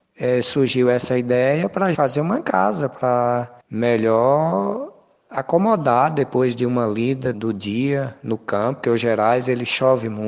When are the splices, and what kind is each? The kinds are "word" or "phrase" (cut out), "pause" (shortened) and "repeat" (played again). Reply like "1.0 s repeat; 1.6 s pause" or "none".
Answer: 1.9 s word; 3.6 s pause; 7.3 s word; 8.8 s word